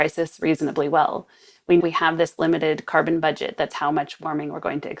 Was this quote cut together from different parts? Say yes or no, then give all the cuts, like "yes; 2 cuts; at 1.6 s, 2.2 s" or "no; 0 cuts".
yes; 2 cuts; at 1.8 s, 3.7 s